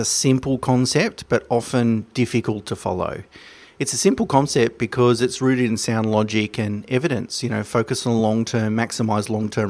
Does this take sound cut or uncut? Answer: uncut